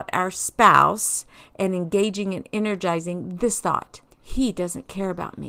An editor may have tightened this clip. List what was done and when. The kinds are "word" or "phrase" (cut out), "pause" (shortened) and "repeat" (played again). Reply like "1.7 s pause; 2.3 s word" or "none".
4.1 s pause